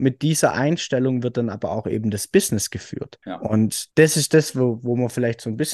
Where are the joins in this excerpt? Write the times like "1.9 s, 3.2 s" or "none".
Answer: 3.2 s, 3.9 s